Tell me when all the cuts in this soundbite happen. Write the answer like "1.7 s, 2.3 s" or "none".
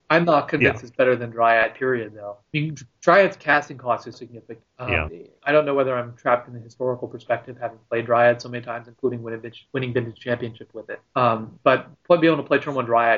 4.1 s, 5.1 s